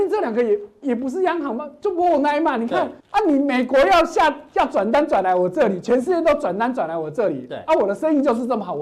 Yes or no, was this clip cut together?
yes